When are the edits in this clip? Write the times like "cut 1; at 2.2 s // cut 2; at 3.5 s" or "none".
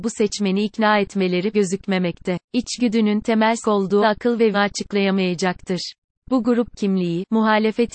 cut 1; at 1.5 s // cut 2; at 2.4 s // cut 3; at 3.6 s // cut 4; at 4.0 s // cut 5; at 4.5 s